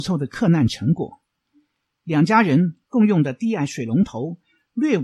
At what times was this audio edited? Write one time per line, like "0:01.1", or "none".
none